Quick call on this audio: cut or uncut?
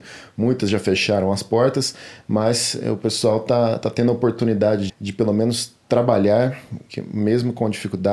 cut